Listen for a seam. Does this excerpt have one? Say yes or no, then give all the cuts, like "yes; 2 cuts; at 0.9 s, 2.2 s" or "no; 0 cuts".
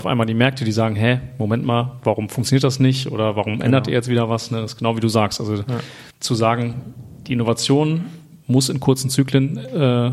yes; 2 cuts; at 6.1 s, 8.4 s